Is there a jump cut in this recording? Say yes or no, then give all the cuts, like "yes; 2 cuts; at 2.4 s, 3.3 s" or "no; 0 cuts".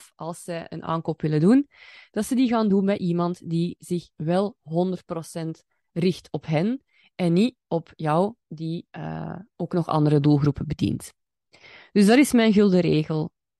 no; 0 cuts